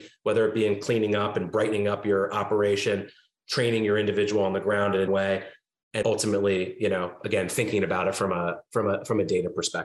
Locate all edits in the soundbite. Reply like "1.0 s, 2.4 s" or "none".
5.1 s, 6.0 s